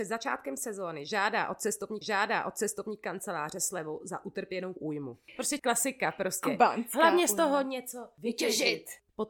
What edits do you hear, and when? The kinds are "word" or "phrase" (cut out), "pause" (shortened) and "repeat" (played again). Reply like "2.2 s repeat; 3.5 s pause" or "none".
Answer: 2.0 s repeat; 4.8 s word; 5.6 s word